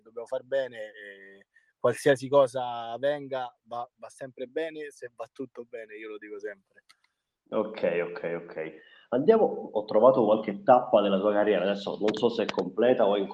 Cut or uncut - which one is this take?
uncut